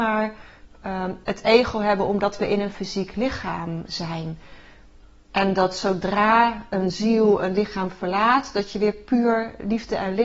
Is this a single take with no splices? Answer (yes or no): yes